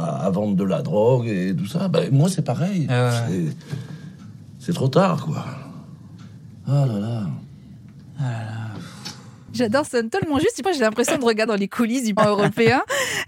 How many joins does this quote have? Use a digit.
4